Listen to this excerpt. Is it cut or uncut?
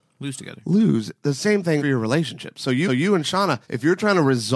cut